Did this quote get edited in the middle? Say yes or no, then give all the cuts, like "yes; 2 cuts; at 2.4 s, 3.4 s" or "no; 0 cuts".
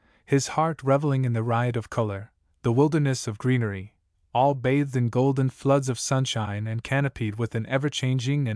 no; 0 cuts